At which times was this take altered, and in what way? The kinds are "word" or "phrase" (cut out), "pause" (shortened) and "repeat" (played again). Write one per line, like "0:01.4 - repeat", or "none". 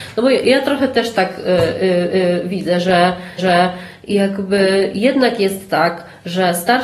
0:02.1 - repeat
0:03.4 - repeat